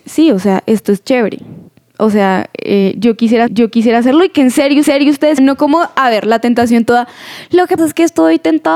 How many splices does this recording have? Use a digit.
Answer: 5